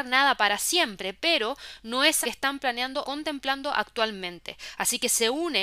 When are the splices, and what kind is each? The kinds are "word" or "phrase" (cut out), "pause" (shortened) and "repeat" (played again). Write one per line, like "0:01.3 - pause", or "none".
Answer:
0:02.2 - word
0:03.0 - word